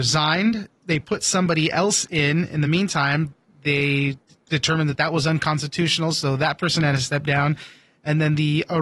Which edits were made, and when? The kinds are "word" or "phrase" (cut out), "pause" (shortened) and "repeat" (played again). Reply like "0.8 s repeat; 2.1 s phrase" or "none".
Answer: none